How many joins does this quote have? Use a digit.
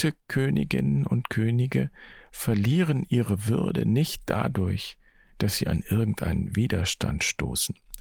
0